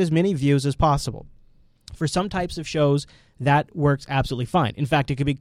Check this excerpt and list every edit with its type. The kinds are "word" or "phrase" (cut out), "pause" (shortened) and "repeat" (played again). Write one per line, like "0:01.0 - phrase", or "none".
none

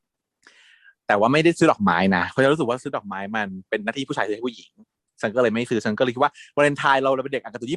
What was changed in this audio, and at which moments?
none

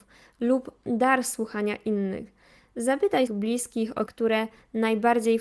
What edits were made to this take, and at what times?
0:03.3 - word
0:04.1 - phrase

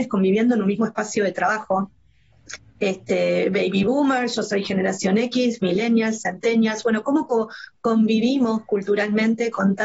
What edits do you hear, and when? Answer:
none

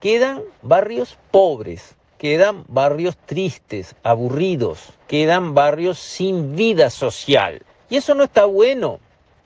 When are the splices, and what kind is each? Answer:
0:05.0 - pause
0:07.7 - pause

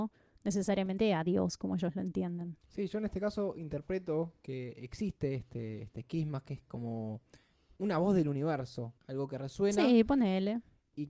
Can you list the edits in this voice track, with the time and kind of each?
0:02.6 - pause
0:07.5 - pause
0:09.0 - pause

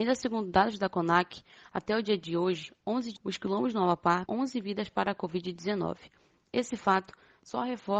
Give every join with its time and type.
0:03.2 - word
0:04.3 - word

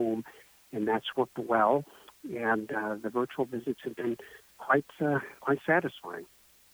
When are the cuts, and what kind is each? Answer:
none

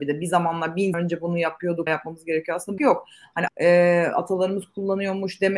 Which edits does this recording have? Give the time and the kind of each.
0:00.9 - word
0:01.9 - word
0:02.8 - phrase
0:03.5 - phrase

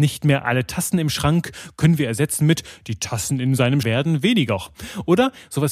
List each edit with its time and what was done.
0:03.8 - word

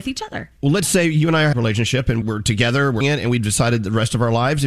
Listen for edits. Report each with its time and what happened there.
0:01.5 - phrase
0:02.2 - word
0:03.0 - word

